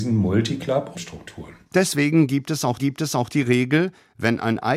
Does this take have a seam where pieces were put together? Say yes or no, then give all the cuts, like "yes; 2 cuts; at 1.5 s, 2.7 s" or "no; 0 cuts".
yes; 2 cuts; at 0.9 s, 2.8 s